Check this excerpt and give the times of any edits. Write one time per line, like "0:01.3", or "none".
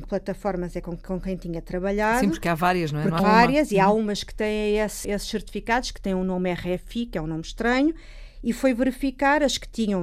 0:03.2
0:05.0